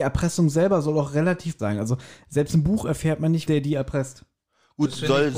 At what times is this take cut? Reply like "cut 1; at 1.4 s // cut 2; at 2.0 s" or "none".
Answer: cut 1; at 1.6 s // cut 2; at 3.5 s